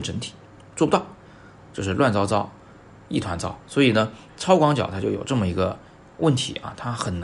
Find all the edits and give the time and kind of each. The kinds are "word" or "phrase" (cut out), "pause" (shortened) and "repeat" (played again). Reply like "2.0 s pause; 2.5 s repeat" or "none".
3.6 s pause